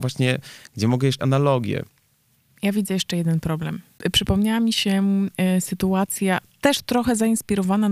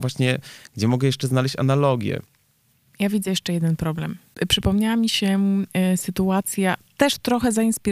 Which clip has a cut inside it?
first; 1 cut; at 1.2 s

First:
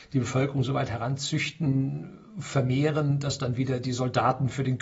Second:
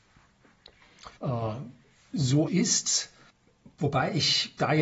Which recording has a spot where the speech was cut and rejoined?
second; 2 cuts; at 1.2 s, 2.5 s

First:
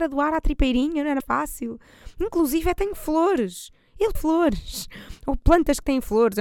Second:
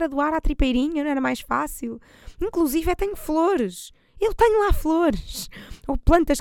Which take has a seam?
first; 2 cuts; at 1.2 s, 4.1 s

